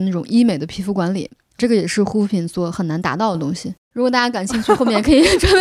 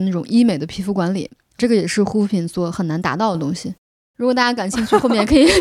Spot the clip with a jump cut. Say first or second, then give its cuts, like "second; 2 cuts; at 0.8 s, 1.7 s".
first; 1 cut; at 3.8 s